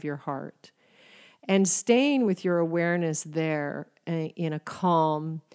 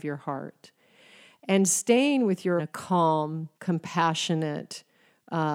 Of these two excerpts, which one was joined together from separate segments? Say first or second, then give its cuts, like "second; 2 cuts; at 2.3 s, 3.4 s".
second; 2 cuts; at 2.6 s, 3.5 s